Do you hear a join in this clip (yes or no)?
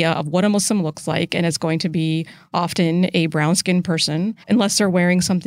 yes